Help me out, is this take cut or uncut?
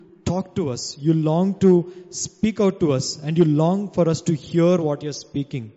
uncut